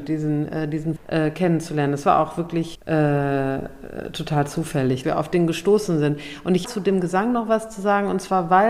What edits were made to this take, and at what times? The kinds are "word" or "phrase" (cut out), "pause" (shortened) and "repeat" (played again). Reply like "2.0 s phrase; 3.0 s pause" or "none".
1.0 s word; 2.7 s word; 5.0 s word; 6.6 s word